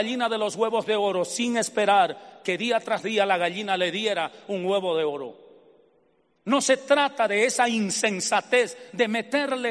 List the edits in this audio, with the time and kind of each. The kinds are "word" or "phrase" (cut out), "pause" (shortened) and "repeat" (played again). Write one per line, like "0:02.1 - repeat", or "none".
none

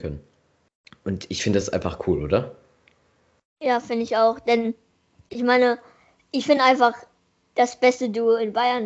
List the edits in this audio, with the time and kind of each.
none

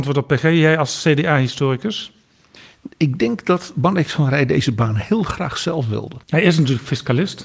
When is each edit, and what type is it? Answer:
0:06.2 - pause

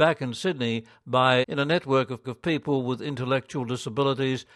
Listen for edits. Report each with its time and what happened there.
0:01.4 - phrase
0:02.2 - repeat

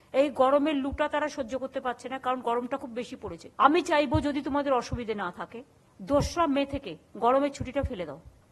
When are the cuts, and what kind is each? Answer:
0:03.5 - pause

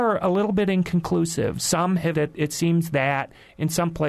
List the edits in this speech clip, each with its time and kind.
0:02.1 - word

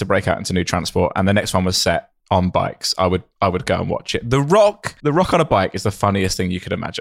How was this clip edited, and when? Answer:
0:03.3 - pause
0:05.0 - pause

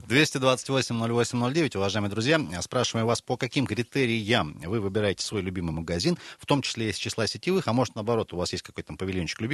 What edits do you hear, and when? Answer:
none

